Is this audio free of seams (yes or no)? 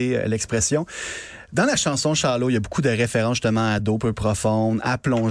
yes